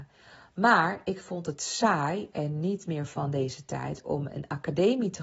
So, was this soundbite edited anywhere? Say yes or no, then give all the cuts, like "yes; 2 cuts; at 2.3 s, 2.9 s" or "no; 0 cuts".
no; 0 cuts